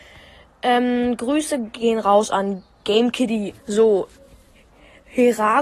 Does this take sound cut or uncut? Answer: cut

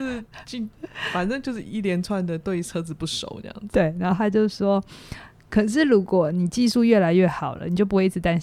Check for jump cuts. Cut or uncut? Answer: uncut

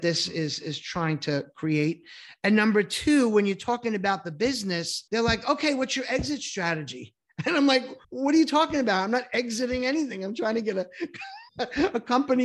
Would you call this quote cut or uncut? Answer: cut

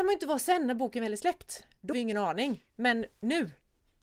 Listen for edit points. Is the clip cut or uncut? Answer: cut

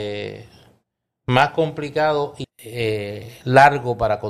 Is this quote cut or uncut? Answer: cut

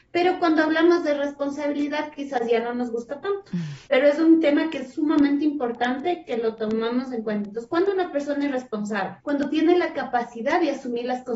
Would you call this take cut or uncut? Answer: cut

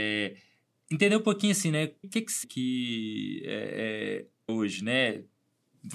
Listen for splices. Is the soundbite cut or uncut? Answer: cut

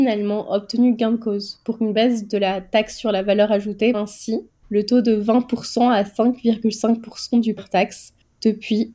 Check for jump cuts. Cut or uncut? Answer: cut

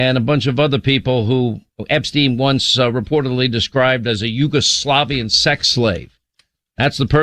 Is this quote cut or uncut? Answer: uncut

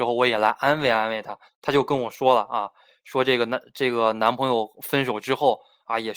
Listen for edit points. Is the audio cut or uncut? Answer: cut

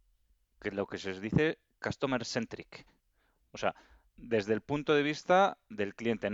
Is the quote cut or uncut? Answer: uncut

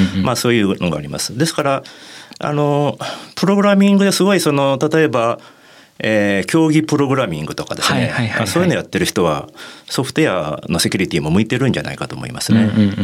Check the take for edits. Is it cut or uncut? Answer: uncut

